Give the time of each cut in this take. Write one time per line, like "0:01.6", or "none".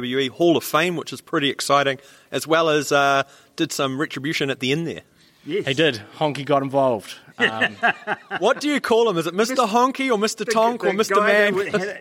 none

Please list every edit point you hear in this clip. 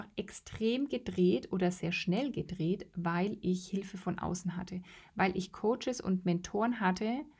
none

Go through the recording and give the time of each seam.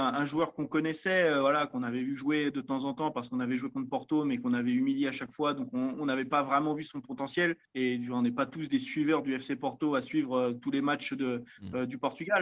0:07.6

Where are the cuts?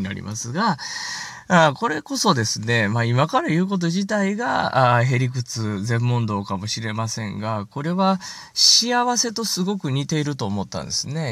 none

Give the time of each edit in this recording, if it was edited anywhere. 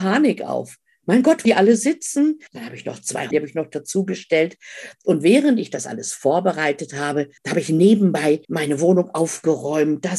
0:01.4
0:02.5
0:03.3
0:07.4
0:08.4

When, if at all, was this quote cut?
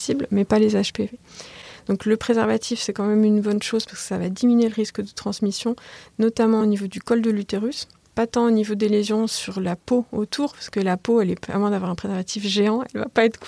none

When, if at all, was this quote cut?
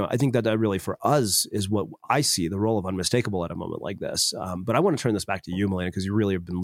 none

